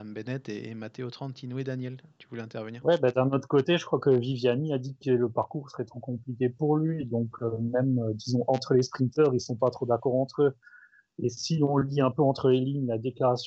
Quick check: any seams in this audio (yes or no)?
no